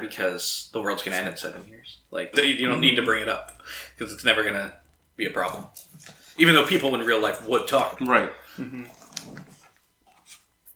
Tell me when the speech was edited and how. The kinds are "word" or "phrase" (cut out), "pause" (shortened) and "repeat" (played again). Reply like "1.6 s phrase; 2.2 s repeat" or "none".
2.3 s word; 7.9 s phrase